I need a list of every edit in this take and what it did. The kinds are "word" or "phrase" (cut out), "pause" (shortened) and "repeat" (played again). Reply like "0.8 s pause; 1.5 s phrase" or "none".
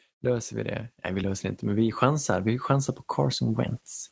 none